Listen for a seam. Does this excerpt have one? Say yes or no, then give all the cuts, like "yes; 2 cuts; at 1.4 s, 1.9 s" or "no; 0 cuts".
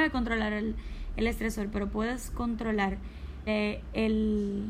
yes; 1 cut; at 3.5 s